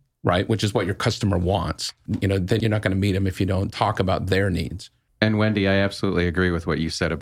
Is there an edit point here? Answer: no; 0 cuts

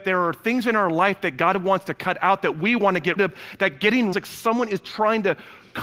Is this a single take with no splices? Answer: no; 2 cuts; at 3.2 s, 4.1 s

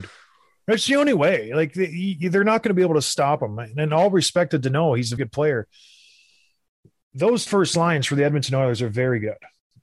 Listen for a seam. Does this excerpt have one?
yes; 2 cuts; at 5.2 s, 7.5 s

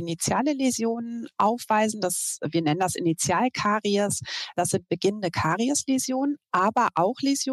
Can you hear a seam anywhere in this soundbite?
no; 0 cuts

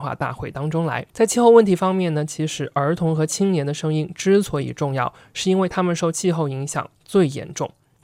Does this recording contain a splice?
yes; 1 cut; at 1.1 s

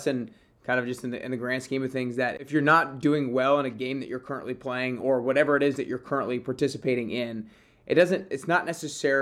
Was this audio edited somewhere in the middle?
no; 0 cuts

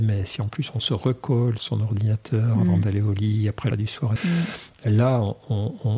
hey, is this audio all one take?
no; 3 cuts; at 1.6 s, 3.7 s, 4.2 s

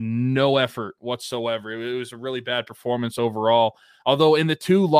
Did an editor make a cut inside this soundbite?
no; 0 cuts

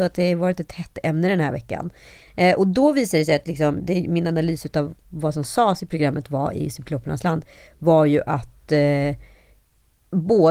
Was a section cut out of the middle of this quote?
no; 0 cuts

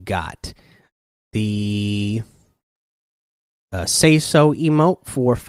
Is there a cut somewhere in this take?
no; 0 cuts

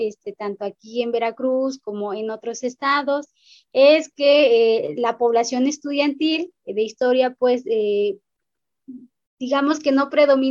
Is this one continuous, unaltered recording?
yes; 0 cuts

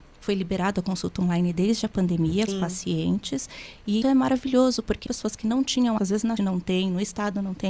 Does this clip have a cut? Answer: yes; 5 cuts; at 2.5 s, 4.0 s, 5.1 s, 6.0 s, 6.4 s

